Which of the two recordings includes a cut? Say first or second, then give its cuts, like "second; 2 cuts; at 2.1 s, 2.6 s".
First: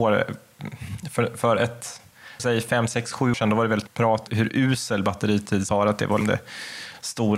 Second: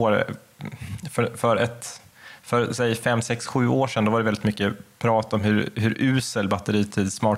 first; 6 cuts; at 2.4 s, 3.3 s, 3.9 s, 4.3 s, 5.7 s, 6.2 s